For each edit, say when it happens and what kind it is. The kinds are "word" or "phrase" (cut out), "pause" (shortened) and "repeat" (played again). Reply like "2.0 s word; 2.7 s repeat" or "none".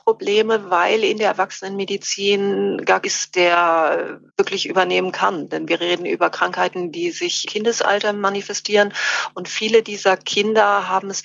3.0 s word; 4.3 s pause; 7.5 s word